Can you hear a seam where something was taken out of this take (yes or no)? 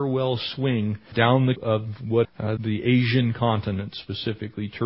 yes